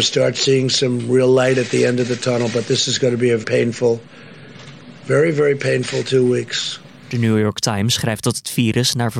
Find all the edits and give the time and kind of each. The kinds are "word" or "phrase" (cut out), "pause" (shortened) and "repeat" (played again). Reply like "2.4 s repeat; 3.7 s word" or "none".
3.4 s word

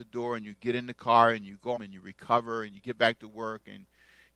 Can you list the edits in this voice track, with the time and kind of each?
1.8 s word

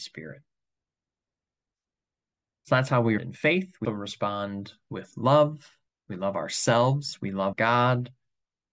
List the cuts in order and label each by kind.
3.2 s word; 3.8 s word; 5.9 s pause; 7.5 s word

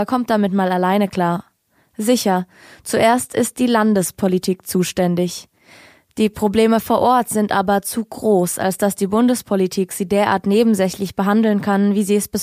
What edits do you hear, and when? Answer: none

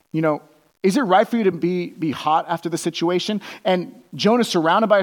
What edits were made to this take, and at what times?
none

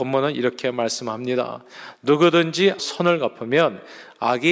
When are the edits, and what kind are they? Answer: 2.8 s word

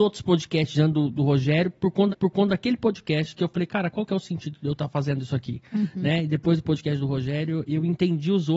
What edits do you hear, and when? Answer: 2.1 s repeat

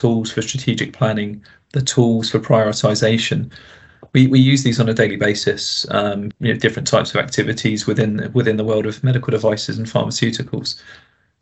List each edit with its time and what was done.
6.3 s word

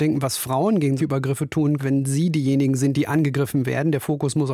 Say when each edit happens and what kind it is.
1.0 s word; 1.8 s word

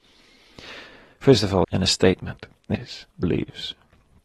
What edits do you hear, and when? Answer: 1.6 s phrase; 2.7 s word; 3.2 s word

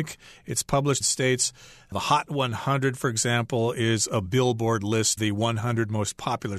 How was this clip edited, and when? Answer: 1.0 s phrase; 5.2 s word

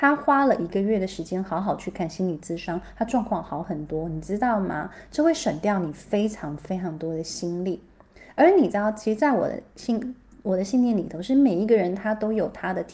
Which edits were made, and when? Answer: none

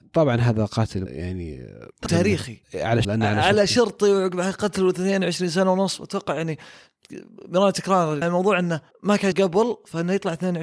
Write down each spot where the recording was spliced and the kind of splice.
1.1 s word; 2.1 s word; 2.6 s pause; 3.0 s word; 8.2 s word; 8.9 s pause; 9.3 s word

